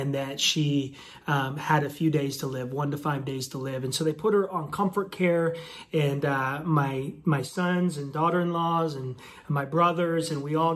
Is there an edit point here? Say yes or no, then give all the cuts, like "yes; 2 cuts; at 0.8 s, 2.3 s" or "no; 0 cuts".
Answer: no; 0 cuts